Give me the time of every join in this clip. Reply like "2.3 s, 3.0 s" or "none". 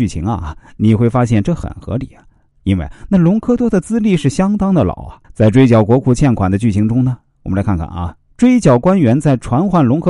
5.2 s